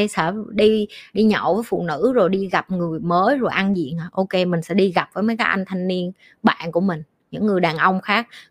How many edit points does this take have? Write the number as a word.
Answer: zero